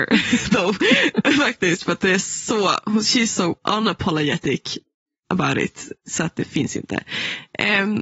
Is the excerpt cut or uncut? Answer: uncut